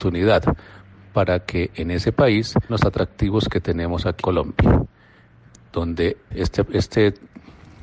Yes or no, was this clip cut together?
yes